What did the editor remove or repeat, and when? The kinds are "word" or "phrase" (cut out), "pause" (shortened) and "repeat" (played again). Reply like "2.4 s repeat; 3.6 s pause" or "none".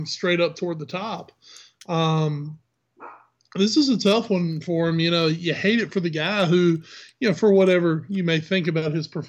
none